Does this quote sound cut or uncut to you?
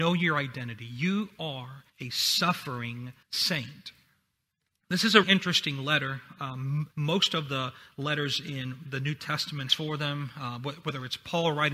cut